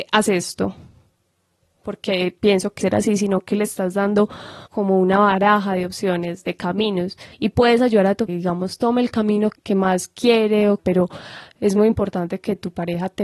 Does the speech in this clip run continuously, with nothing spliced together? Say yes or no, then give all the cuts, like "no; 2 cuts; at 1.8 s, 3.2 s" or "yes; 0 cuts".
no; 6 cuts; at 2.8 s, 4.7 s, 7.3 s, 8.3 s, 9.6 s, 10.8 s